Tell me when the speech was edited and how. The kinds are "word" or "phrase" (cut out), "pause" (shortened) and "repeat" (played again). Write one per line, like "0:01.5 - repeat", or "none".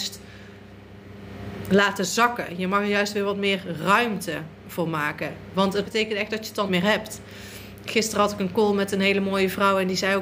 0:05.8 - word
0:06.7 - word